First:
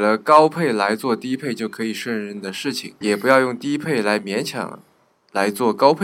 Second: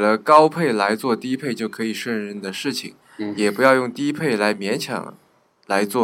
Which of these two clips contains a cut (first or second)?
first